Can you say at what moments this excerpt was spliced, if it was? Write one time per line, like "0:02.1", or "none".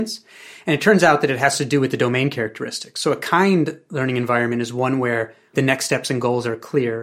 0:05.5